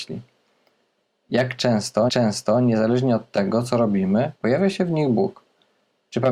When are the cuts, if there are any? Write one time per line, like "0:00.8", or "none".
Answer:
0:02.1
0:04.3

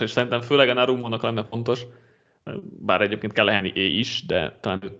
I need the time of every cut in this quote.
0:01.2

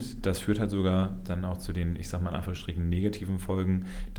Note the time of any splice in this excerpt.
none

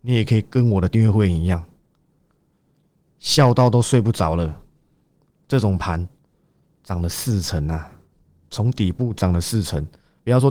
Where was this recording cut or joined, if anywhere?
none

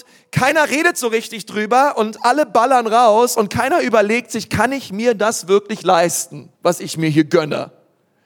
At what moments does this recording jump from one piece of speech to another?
0:06.5

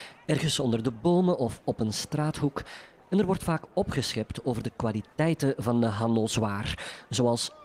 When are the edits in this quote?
none

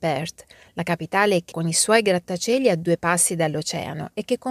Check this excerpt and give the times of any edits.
0:01.5

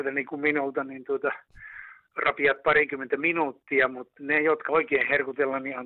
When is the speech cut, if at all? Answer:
0:04.1
0:04.7

